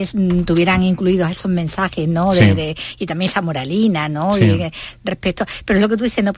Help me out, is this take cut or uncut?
uncut